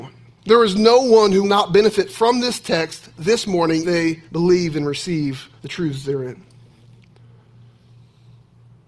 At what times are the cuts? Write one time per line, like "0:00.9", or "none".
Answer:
0:01.4
0:03.8
0:04.3
0:05.6